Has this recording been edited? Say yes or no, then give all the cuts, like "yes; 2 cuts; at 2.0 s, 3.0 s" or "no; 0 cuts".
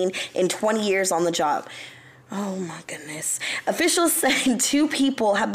no; 0 cuts